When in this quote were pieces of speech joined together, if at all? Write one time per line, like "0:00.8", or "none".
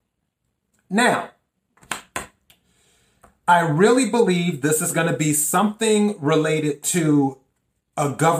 none